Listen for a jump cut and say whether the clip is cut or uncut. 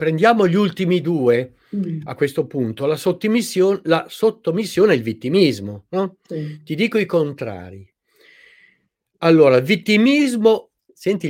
uncut